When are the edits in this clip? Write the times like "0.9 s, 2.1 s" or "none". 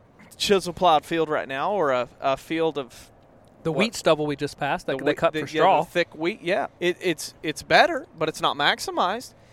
6.8 s